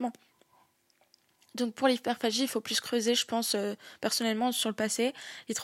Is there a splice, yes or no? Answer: no